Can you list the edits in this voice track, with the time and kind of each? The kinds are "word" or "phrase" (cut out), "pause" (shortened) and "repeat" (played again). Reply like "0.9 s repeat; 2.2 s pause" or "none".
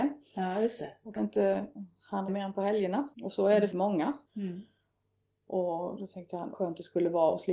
1.2 s word; 2.3 s word; 3.1 s pause; 3.7 s word; 4.3 s pause; 6.5 s phrase